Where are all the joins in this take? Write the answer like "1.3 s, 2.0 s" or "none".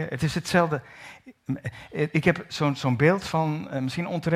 none